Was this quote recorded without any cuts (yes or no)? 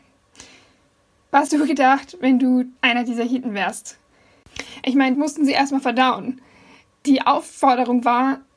no